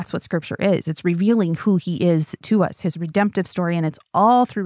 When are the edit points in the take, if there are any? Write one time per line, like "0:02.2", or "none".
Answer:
none